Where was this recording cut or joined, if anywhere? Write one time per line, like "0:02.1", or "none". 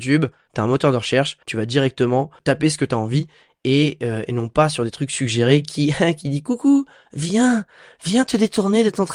0:01.4